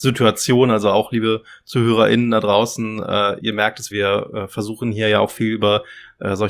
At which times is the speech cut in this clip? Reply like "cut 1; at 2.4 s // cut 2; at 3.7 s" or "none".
cut 1; at 3.4 s // cut 2; at 3.9 s